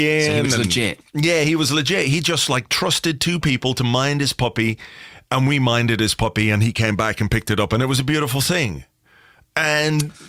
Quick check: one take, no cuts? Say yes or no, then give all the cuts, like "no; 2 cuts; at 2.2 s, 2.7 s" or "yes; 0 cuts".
yes; 0 cuts